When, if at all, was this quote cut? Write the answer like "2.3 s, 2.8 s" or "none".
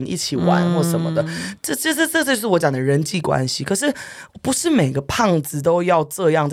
none